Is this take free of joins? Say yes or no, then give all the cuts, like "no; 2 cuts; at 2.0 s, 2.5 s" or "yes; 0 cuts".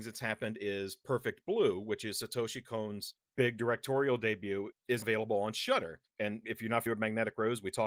no; 3 cuts; at 5.0 s, 6.1 s, 6.9 s